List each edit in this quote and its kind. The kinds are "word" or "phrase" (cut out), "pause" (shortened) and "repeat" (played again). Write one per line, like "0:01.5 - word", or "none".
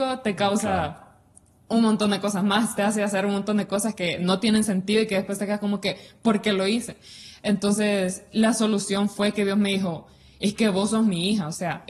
none